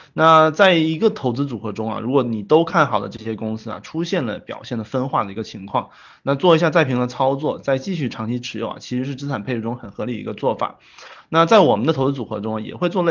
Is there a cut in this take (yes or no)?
no